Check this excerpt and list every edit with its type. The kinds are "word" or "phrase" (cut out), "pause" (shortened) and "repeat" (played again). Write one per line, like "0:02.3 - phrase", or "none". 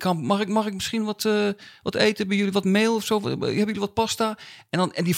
none

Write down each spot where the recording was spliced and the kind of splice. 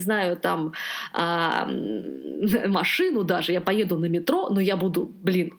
none

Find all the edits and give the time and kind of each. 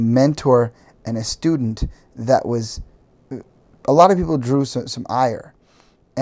none

